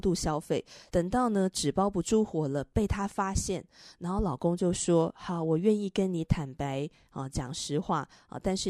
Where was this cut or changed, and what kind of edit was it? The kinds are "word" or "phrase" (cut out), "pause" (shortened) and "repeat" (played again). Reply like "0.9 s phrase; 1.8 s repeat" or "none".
none